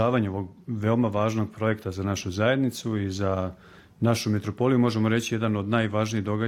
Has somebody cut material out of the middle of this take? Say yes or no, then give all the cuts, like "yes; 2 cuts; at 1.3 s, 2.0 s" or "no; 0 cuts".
no; 0 cuts